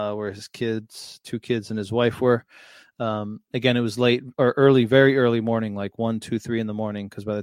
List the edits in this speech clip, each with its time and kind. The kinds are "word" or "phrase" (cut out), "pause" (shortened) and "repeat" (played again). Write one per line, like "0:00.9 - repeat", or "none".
none